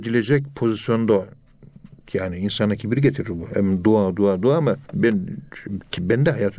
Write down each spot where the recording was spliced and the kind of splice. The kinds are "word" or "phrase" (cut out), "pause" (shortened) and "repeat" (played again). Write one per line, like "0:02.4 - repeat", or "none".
0:04.8 - pause